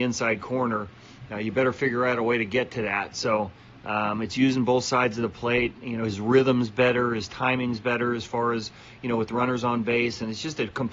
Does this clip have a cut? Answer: no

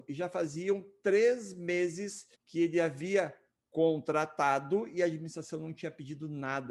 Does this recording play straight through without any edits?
no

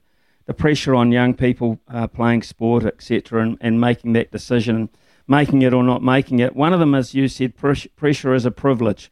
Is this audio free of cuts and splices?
yes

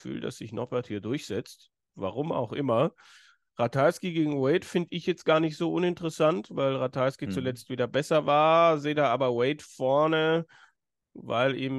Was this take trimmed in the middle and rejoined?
no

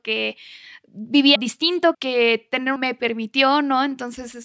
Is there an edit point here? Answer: yes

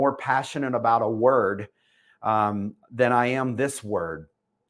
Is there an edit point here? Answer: no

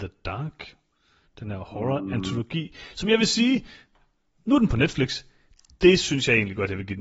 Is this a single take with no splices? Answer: yes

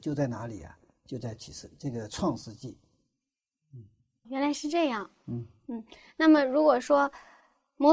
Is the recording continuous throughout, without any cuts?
no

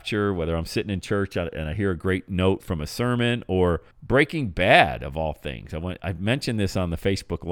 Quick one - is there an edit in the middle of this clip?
yes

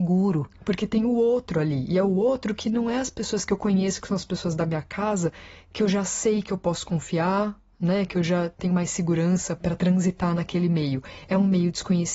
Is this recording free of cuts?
yes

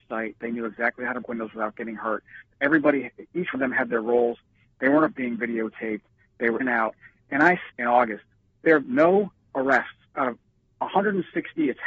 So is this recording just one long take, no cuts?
no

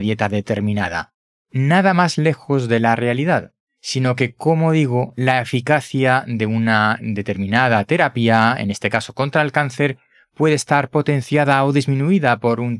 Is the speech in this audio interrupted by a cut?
no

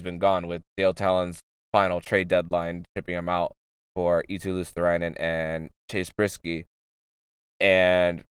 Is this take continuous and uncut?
yes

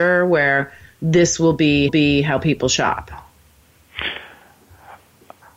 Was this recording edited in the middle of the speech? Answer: yes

